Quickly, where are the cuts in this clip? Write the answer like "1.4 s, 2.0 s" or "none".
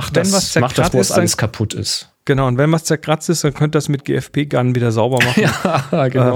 0.9 s